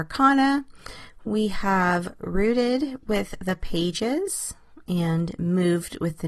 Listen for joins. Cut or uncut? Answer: uncut